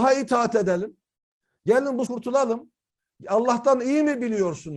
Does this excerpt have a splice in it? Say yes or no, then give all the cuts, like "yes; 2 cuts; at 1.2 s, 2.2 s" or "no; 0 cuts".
yes; 1 cut; at 2.1 s